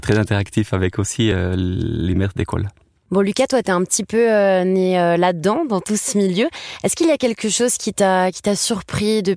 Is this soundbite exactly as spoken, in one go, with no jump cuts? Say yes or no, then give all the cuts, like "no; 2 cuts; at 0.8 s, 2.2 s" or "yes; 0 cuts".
yes; 0 cuts